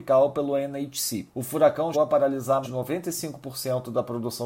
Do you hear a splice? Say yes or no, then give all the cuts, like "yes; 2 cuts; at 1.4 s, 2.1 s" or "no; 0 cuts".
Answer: yes; 3 cuts; at 1.3 s, 1.9 s, 2.6 s